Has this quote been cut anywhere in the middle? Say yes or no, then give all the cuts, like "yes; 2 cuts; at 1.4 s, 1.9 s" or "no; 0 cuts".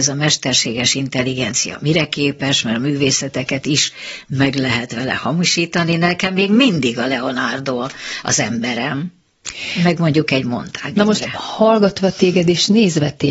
no; 0 cuts